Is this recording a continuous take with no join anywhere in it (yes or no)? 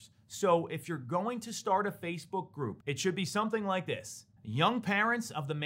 no